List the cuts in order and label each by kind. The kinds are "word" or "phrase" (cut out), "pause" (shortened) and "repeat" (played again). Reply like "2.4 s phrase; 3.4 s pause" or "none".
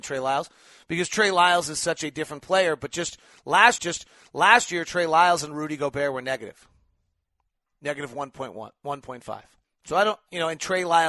3.8 s repeat; 9.6 s pause